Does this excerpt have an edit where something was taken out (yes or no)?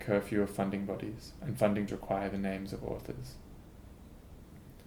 yes